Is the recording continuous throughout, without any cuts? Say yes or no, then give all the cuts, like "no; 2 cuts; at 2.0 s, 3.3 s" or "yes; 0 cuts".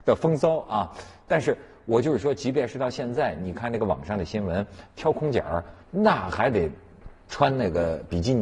no; 2 cuts; at 5.8 s, 7.2 s